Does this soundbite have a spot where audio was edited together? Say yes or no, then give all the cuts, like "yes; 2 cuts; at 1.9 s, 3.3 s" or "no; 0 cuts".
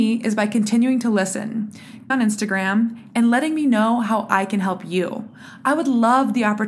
yes; 1 cut; at 2.1 s